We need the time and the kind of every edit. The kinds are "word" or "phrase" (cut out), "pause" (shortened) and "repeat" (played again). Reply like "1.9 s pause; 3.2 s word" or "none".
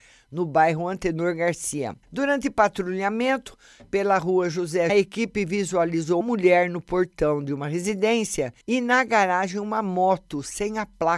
2.0 s pause; 4.9 s phrase; 6.2 s word; 8.6 s pause